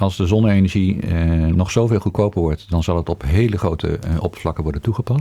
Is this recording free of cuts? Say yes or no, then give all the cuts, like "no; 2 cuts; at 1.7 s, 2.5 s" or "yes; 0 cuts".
yes; 0 cuts